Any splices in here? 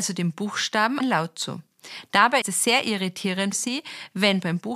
yes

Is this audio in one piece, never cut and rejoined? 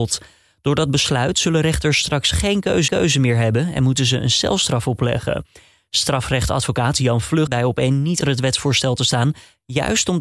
no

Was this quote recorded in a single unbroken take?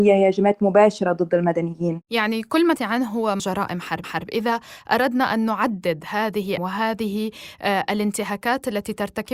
no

